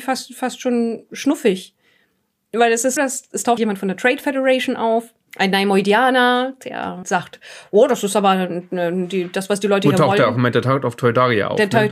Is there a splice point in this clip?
yes; 4 cuts; at 3.0 s, 3.6 s, 5.2 s, 7.0 s

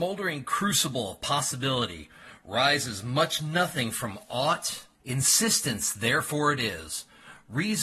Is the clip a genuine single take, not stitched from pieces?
no; 1 cut; at 4.9 s

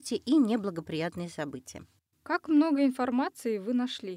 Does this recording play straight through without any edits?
yes; 0 cuts

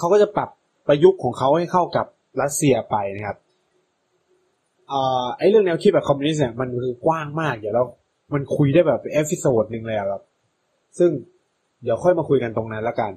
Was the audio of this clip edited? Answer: no; 0 cuts

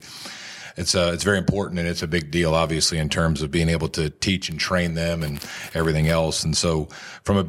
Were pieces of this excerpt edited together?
no; 0 cuts

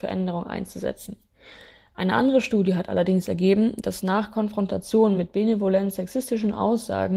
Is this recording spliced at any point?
no; 0 cuts

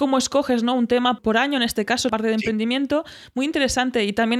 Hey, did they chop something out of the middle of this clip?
yes; 2 cuts; at 1.2 s, 2.1 s

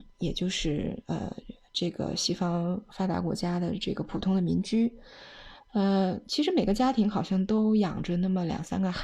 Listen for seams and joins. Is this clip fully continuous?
yes; 0 cuts

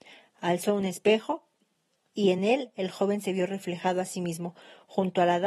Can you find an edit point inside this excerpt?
no; 0 cuts

